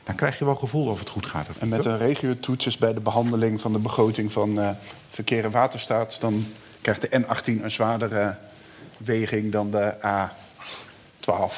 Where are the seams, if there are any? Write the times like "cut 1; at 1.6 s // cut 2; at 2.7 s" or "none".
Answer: none